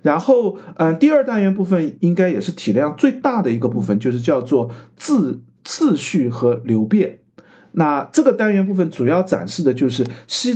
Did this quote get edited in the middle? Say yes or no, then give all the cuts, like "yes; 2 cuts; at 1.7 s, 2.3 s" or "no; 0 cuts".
no; 0 cuts